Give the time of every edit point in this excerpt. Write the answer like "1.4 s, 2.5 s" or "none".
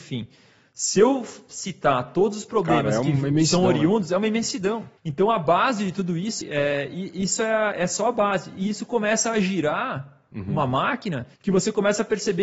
5.0 s, 6.4 s, 11.3 s